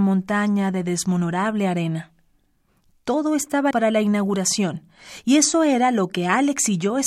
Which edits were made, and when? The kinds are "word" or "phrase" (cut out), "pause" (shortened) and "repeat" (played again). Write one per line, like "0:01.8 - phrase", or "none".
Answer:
0:03.7 - word